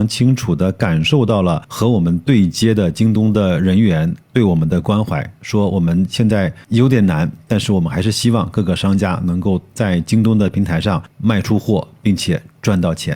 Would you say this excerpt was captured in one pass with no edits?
yes; 0 cuts

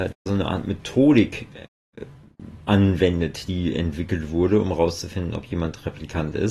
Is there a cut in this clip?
no; 0 cuts

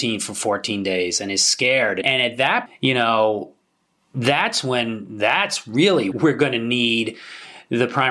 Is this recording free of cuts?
no; 2 cuts; at 2.7 s, 6.1 s

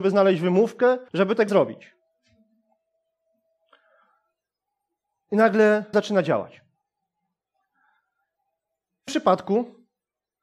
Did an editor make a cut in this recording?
yes; 4 cuts; at 1.1 s, 1.5 s, 5.9 s, 9.1 s

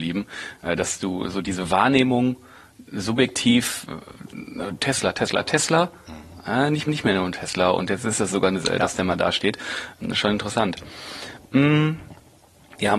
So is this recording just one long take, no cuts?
no; 2 cuts; at 6.9 s, 8.6 s

